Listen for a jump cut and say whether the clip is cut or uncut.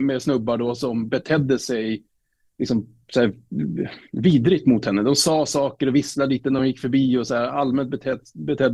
uncut